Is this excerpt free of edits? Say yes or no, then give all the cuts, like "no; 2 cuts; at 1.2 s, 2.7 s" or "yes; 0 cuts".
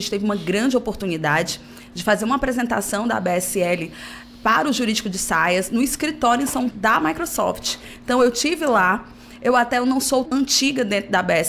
no; 2 cuts; at 6.7 s, 10.3 s